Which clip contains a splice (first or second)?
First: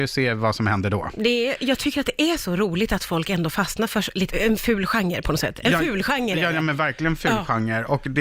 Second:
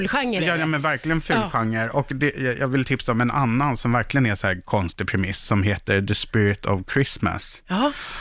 first